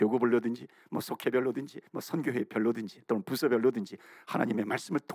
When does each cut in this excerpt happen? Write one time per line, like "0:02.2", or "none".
0:01.9